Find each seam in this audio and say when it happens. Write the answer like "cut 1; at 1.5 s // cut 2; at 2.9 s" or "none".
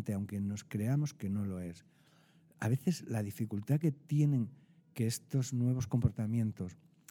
none

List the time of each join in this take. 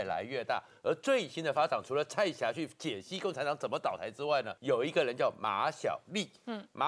cut 1; at 4.6 s

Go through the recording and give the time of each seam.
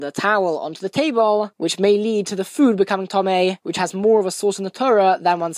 none

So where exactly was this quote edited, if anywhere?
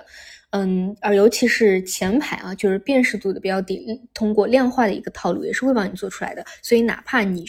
none

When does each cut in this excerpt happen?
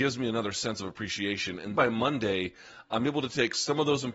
cut 1; at 1.7 s

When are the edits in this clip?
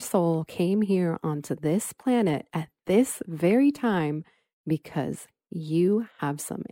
none

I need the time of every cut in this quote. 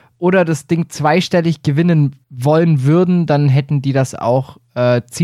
cut 1; at 2.2 s

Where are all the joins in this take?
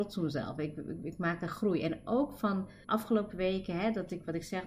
cut 1; at 2.8 s

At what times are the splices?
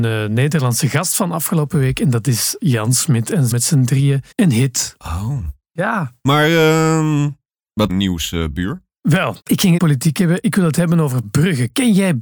cut 1; at 3.5 s // cut 2; at 4.3 s // cut 3; at 7.9 s // cut 4; at 9.4 s // cut 5; at 9.8 s

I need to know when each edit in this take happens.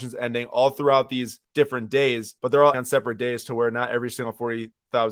cut 1; at 1.4 s // cut 2; at 2.4 s // cut 3; at 2.7 s

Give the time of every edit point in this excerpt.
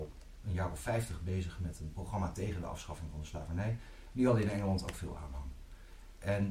none

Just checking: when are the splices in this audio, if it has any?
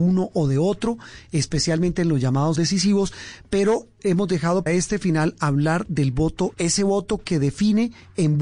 cut 1; at 2.6 s // cut 2; at 4.0 s // cut 3; at 4.7 s // cut 4; at 6.5 s

